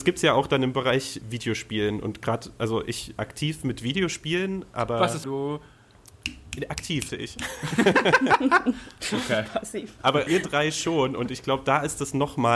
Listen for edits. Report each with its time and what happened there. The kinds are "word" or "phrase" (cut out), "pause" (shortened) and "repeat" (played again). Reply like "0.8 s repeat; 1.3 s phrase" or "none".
1.2 s word; 2.6 s word; 3.2 s phrase; 5.2 s phrase; 7.1 s word; 10.3 s word